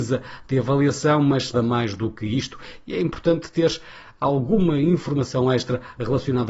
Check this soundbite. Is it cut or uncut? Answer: cut